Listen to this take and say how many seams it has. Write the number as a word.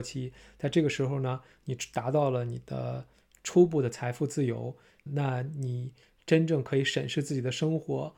one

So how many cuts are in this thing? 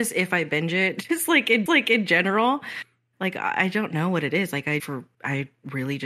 three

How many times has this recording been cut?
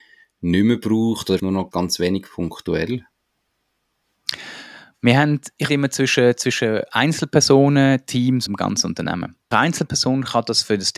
five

